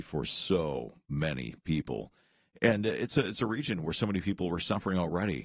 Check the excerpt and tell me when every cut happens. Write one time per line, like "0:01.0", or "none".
none